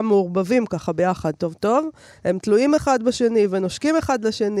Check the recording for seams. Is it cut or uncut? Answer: uncut